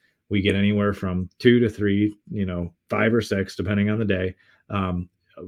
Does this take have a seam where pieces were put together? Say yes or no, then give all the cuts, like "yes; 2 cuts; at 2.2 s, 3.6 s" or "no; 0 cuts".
yes; 1 cut; at 2.2 s